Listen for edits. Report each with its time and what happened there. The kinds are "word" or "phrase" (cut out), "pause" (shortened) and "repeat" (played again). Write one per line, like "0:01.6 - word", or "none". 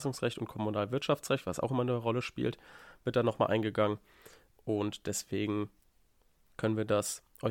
none